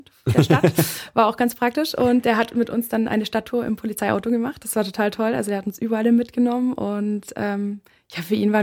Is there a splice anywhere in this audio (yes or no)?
no